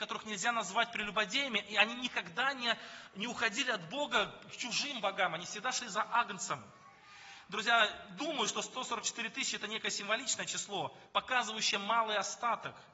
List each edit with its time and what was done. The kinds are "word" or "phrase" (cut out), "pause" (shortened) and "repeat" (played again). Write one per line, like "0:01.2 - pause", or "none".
0:11.1 - pause